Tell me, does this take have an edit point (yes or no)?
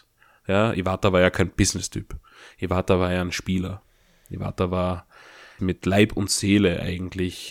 yes